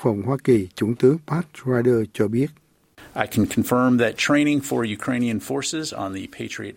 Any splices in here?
no; 0 cuts

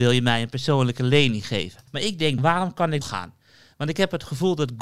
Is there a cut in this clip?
yes; 3 cuts; at 1.9 s, 2.4 s, 3.0 s

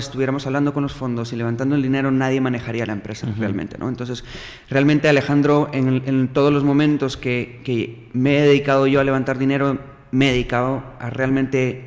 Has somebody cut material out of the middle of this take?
no; 0 cuts

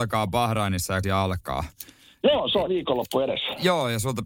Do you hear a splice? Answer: yes; 2 cuts; at 1.0 s, 2.7 s

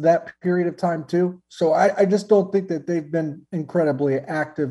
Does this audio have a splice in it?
no; 0 cuts

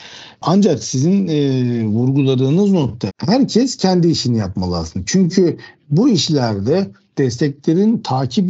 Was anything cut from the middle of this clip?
yes; 1 cut; at 3.1 s

